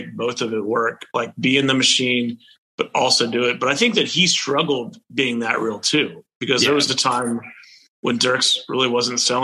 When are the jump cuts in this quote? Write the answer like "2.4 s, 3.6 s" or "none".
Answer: none